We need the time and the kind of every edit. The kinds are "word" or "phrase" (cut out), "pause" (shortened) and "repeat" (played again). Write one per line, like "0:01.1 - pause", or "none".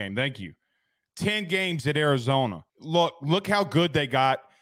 0:02.7 - pause